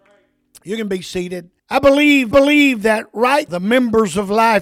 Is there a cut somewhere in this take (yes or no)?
yes